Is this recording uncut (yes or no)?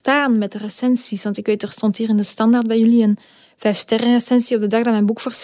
yes